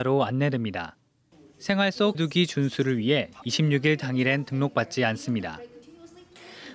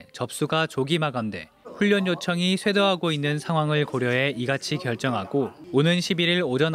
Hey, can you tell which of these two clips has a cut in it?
first; 1 cut; at 2.1 s

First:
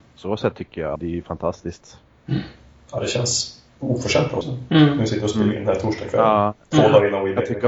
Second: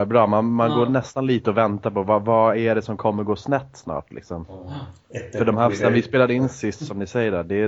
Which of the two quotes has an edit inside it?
first; 3 cuts; at 1.0 s, 3.7 s, 4.4 s

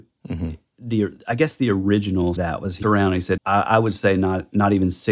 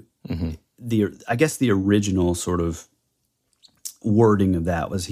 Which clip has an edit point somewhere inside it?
first; 3 cuts; at 2.4 s, 2.8 s, 3.4 s

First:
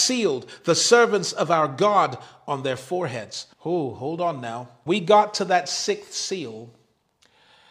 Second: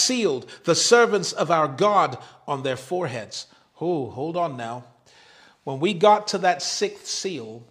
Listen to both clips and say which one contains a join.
first; 2 cuts; at 3.5 s, 4.9 s

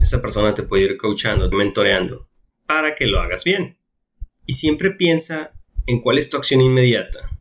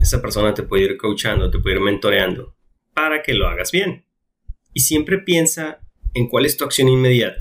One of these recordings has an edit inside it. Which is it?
first; 1 cut; at 1.5 s

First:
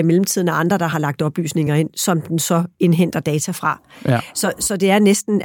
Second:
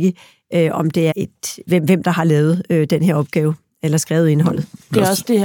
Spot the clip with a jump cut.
second; 3 cuts; at 1.1 s, 1.7 s, 2.0 s

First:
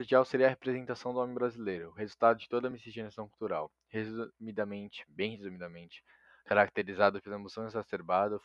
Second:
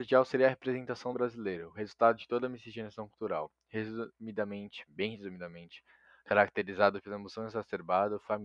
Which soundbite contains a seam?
second; 1 cut; at 1.1 s

